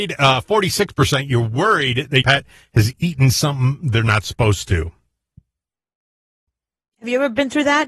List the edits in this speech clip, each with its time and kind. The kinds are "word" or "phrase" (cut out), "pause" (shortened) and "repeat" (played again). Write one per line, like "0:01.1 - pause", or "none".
0:02.2 - word